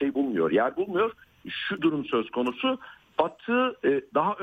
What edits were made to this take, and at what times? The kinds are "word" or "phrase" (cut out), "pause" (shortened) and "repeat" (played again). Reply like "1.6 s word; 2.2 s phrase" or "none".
1.8 s phrase